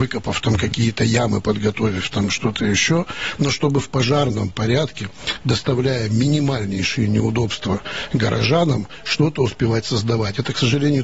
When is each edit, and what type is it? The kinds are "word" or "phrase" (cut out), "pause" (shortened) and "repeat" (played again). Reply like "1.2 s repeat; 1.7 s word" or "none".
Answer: none